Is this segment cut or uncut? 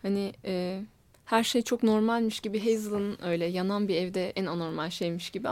cut